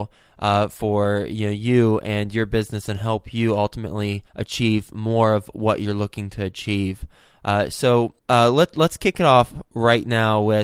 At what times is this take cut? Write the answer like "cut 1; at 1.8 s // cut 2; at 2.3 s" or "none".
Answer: cut 1; at 4.3 s // cut 2; at 8.2 s